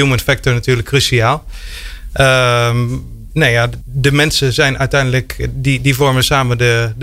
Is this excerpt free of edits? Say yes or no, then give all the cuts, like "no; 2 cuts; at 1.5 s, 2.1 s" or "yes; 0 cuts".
no; 1 cut; at 3.8 s